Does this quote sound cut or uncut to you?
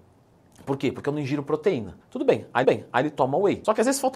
cut